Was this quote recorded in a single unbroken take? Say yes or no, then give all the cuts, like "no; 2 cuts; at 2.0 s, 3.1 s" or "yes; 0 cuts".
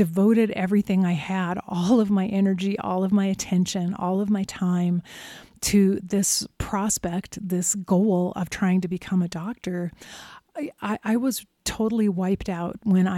yes; 0 cuts